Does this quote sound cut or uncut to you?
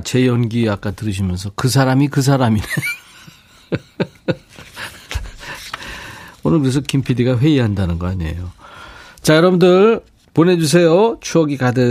uncut